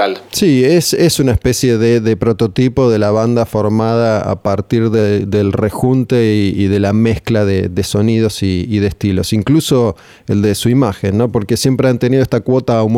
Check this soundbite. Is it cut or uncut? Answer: uncut